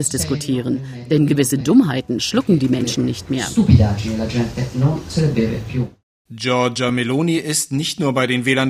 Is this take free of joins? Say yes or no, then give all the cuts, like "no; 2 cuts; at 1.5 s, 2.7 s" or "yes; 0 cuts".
yes; 0 cuts